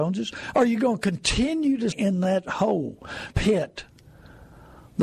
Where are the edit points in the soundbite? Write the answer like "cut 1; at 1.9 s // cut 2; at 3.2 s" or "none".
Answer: cut 1; at 1.9 s // cut 2; at 3.3 s